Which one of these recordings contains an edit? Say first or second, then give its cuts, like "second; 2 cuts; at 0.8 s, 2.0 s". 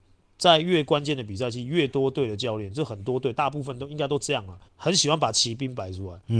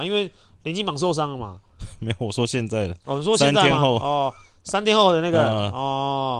first; 1 cut; at 4.7 s